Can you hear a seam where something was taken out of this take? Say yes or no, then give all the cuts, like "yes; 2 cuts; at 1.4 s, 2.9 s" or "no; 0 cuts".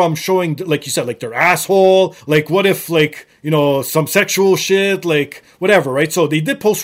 yes; 1 cut; at 2.2 s